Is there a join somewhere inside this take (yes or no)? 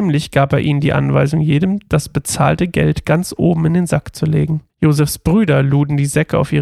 yes